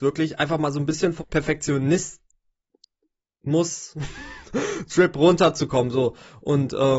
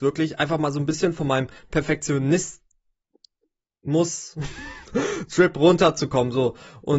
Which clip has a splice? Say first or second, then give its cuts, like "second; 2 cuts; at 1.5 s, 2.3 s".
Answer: first; 1 cut; at 1.2 s